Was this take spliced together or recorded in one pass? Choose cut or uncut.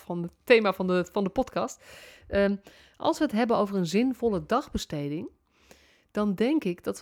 uncut